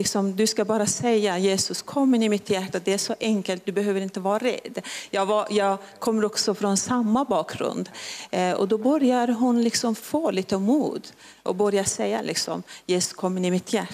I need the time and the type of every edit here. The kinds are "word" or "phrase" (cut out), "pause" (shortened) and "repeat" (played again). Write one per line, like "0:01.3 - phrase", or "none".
none